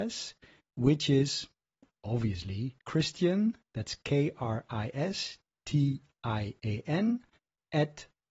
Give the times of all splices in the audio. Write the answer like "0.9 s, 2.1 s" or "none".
2.8 s, 6.1 s